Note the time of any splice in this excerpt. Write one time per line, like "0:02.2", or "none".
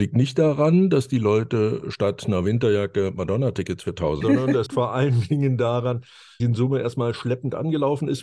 0:04.2
0:04.7
0:06.4